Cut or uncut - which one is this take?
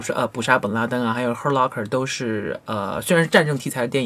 uncut